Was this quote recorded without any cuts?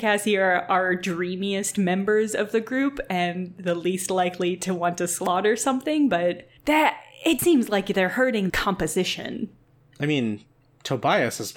no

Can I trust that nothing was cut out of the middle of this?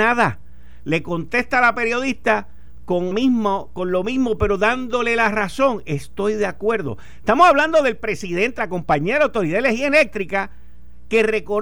no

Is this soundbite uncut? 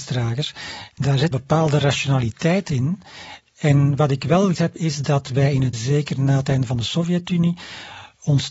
no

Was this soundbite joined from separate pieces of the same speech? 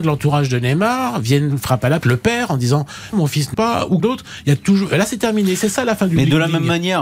yes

